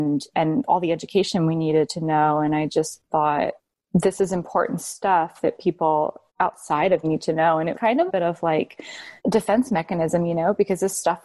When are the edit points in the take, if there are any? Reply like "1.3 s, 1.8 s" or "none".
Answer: 3.1 s, 6.3 s, 7.0 s, 7.7 s, 8.1 s, 9.2 s